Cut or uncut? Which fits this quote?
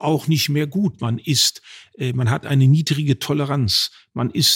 uncut